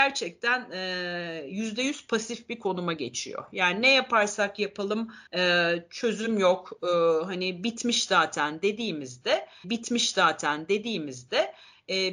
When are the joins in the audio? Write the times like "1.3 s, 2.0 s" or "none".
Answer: 5.3 s, 9.6 s